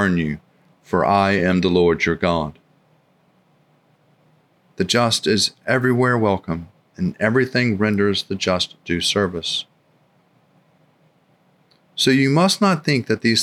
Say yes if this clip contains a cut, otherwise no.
no